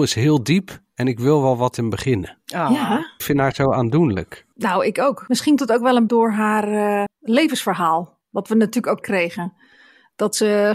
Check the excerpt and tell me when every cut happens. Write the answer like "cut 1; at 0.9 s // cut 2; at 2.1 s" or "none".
cut 1; at 1.7 s // cut 2; at 5.6 s // cut 3; at 6.1 s // cut 4; at 7.1 s // cut 5; at 9.0 s